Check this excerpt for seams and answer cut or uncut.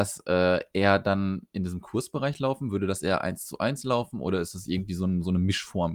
uncut